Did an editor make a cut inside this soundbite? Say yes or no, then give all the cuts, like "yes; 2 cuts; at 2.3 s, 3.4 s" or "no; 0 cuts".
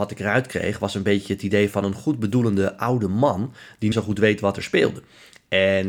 yes; 1 cut; at 3.9 s